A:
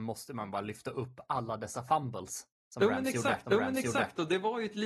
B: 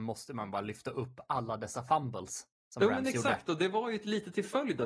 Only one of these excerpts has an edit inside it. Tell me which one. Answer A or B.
A